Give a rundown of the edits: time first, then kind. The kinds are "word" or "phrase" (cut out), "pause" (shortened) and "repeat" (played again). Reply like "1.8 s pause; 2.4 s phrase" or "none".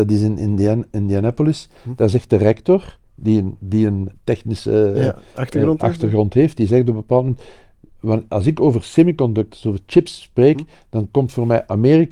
4.1 s word

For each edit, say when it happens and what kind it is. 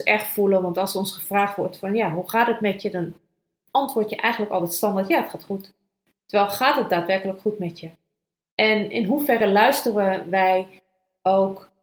none

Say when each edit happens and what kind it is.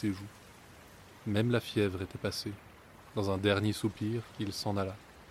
3.0 s pause

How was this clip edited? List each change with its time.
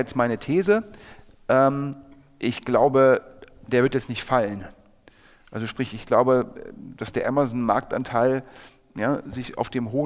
none

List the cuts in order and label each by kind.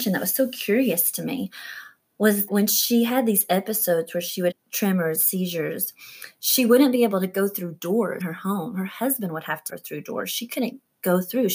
2.5 s word; 4.5 s word; 5.1 s word; 8.2 s word; 9.7 s word

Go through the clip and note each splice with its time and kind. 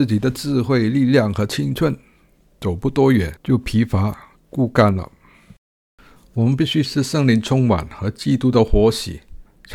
none

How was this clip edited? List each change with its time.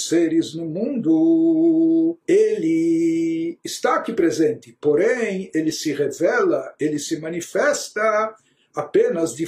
2.2 s pause

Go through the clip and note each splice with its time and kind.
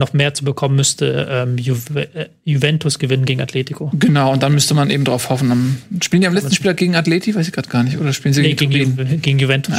none

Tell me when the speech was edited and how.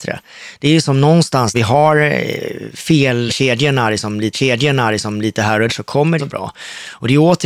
1.5 s phrase; 3.3 s word; 4.3 s repeat; 5.7 s word; 6.2 s phrase

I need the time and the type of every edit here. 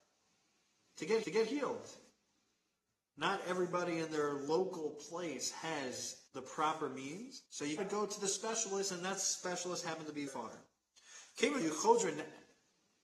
1.2 s repeat; 6.3 s pause; 7.5 s pause; 7.8 s word; 10.3 s word; 11.6 s word

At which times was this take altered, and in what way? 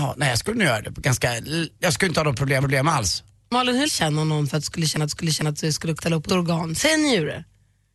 1.7 s pause; 2.6 s repeat; 3.9 s phrase; 5.1 s repeat; 6.0 s word; 6.3 s phrase

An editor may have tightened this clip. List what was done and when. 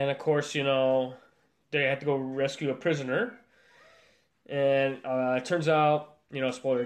none

